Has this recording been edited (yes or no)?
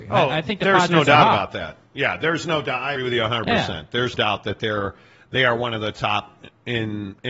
yes